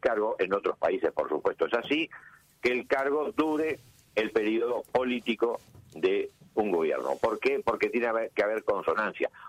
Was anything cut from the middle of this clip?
no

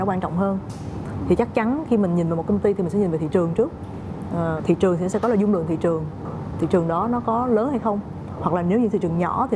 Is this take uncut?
no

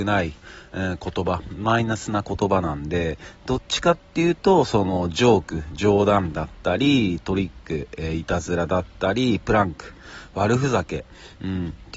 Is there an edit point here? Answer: no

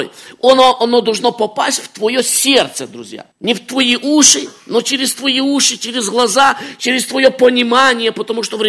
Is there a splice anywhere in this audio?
yes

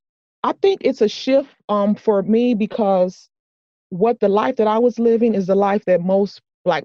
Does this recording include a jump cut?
no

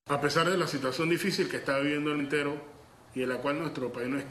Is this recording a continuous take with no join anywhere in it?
no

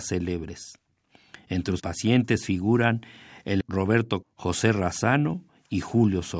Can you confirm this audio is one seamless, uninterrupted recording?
no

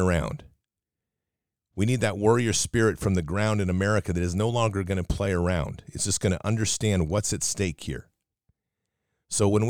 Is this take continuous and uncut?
yes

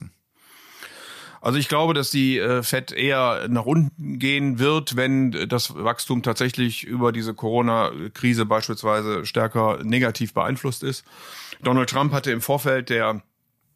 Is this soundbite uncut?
yes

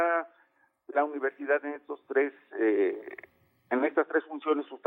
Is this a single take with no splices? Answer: yes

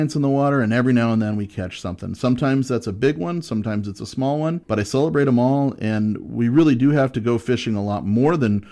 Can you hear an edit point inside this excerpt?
yes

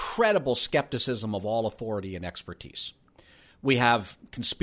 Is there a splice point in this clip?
no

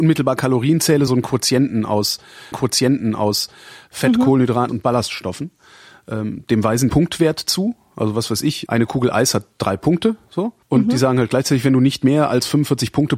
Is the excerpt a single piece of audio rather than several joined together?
no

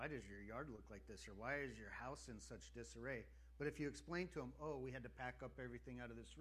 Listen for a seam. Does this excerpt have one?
no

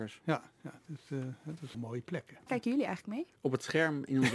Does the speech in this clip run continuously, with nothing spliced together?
no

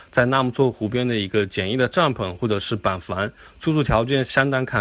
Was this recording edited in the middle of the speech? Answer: no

